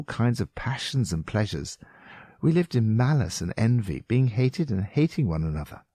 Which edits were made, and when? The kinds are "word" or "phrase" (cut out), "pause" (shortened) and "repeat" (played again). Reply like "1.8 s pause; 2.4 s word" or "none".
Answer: none